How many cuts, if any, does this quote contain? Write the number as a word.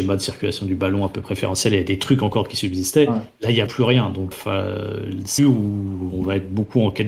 three